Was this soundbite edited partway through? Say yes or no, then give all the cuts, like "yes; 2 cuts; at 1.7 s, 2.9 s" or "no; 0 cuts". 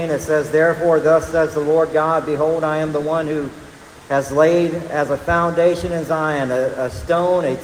no; 0 cuts